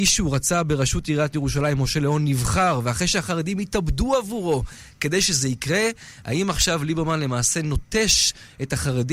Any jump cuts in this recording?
no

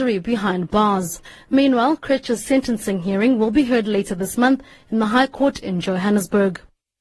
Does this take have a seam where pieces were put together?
no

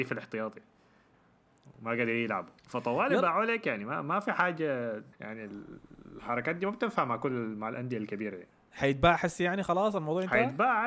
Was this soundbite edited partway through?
yes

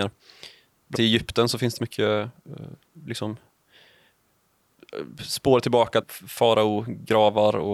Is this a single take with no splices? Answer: no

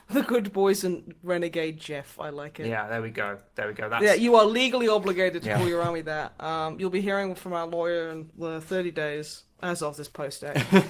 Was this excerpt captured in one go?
yes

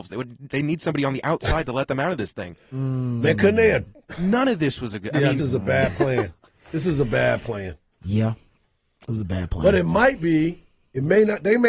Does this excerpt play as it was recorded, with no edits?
no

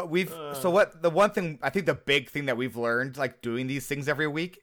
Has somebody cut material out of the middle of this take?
no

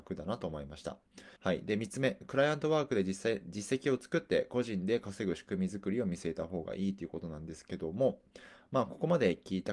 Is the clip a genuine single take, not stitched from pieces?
no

